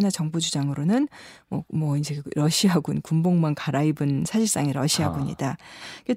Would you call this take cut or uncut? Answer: uncut